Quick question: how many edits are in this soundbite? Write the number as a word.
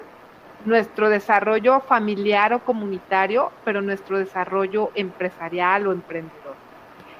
zero